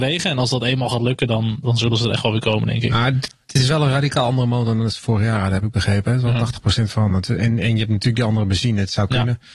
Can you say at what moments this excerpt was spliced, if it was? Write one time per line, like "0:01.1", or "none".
none